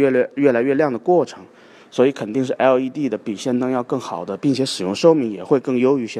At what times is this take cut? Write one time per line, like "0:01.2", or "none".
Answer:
none